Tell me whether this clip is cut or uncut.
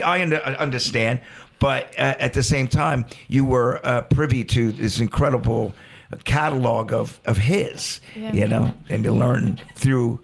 uncut